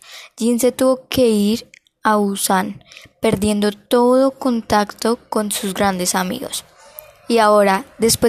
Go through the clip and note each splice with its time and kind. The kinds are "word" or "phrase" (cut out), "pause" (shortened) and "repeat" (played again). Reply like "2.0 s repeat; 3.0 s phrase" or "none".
none